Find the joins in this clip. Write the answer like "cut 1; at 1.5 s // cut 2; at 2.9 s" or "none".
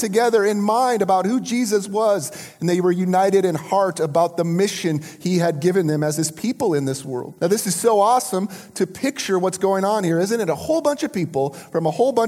cut 1; at 7.4 s